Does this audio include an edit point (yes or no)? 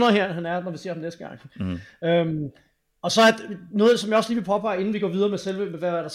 no